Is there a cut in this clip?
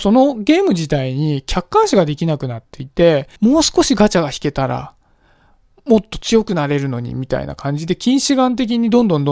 yes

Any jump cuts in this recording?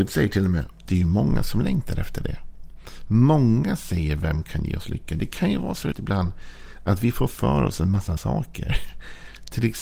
yes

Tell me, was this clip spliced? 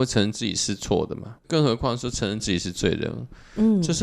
yes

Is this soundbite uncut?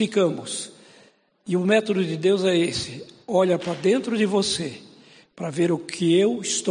yes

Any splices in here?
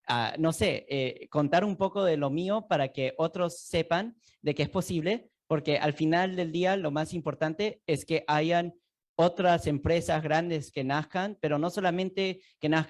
no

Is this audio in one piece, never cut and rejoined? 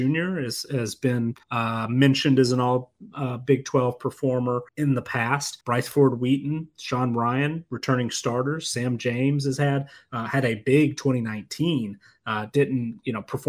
no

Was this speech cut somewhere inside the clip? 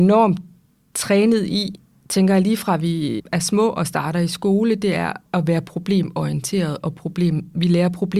yes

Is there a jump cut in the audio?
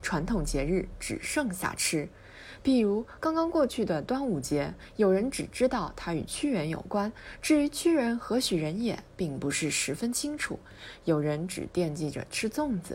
no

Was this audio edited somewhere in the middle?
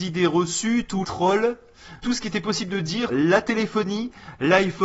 yes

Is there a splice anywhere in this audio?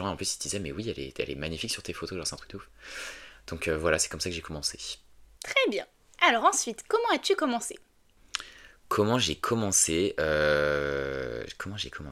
no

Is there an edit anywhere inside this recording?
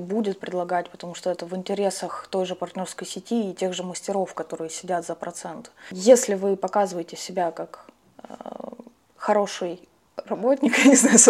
no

